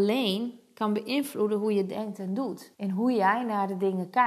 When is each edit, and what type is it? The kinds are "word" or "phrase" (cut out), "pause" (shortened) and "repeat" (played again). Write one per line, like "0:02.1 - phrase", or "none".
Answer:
0:02.7 - pause